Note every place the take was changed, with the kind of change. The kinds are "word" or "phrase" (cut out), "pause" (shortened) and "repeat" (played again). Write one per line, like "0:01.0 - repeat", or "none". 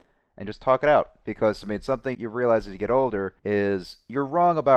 0:02.1 - word
0:03.4 - pause